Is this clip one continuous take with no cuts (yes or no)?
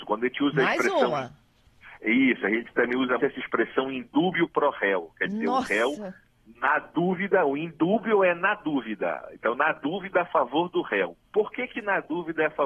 no